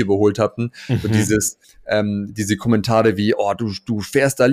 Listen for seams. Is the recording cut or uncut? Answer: cut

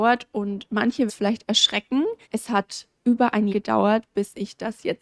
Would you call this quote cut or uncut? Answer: cut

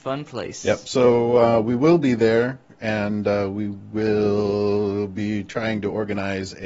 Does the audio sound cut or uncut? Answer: uncut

